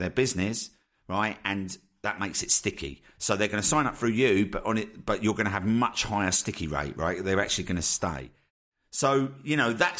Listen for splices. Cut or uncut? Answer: uncut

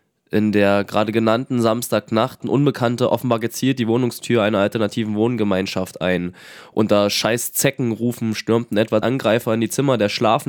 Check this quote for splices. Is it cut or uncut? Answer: cut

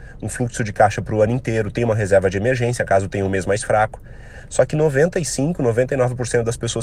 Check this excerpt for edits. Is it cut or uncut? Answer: uncut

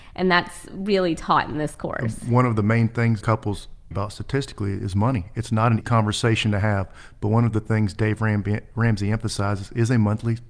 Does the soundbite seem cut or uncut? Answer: cut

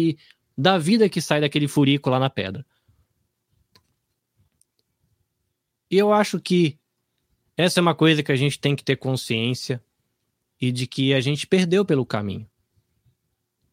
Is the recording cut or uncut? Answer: uncut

